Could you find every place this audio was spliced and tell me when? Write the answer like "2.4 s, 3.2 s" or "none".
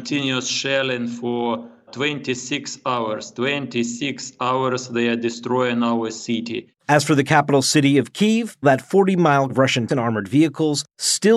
1.9 s, 8.6 s, 9.5 s, 9.9 s